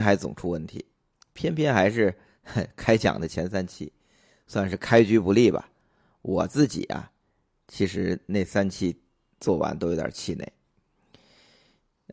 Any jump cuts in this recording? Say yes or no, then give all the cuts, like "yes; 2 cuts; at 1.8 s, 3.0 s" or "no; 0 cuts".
no; 0 cuts